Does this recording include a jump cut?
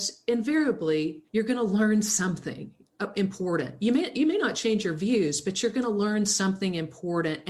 yes; 1 cut; at 1.3 s

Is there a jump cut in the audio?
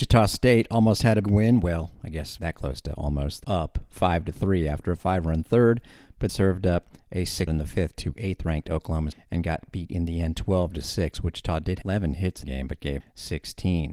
yes; 9 cuts; at 1.2 s, 2.4 s, 3.4 s, 6.3 s, 7.5 s, 9.1 s, 11.8 s, 12.4 s, 13.0 s

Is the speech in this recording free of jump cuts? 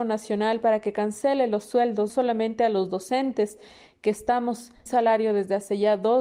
no; 2 cuts; at 2.1 s, 4.9 s

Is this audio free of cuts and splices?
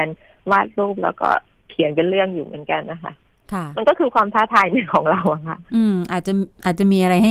yes; 0 cuts

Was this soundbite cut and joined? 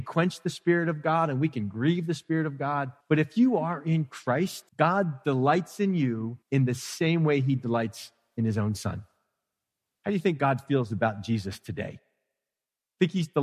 yes; 3 cuts; at 3.0 s, 4.7 s, 6.4 s

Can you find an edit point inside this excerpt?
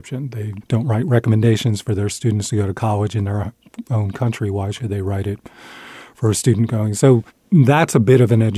no; 0 cuts

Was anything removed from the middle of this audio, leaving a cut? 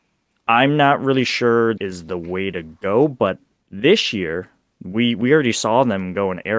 yes; 1 cut; at 1.8 s

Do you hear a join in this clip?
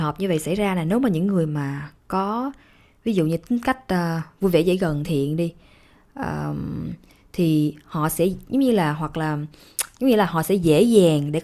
yes; 1 cut; at 5.0 s

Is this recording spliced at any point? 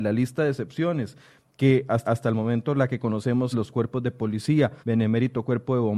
yes; 3 cuts; at 2.0 s, 3.5 s, 4.8 s

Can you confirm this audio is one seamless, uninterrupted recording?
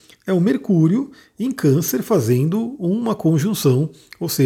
yes; 0 cuts

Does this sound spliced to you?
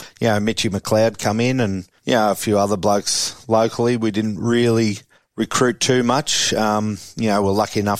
yes; 2 cuts; at 2.0 s, 5.1 s

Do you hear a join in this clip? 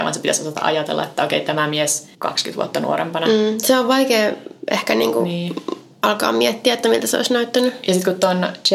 yes; 1 cut; at 2.1 s

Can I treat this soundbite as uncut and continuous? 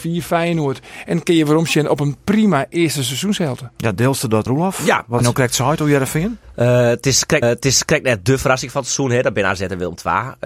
no; 3 cuts; at 4.5 s, 5.2 s, 7.4 s

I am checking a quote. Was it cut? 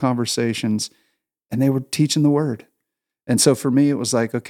no; 0 cuts

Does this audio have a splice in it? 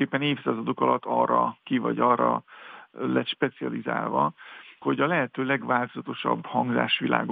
yes; 2 cuts; at 1.6 s, 4.8 s

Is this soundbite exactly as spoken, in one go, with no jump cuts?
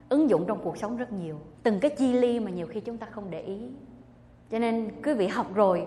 no; 2 cuts; at 1.5 s, 4.2 s

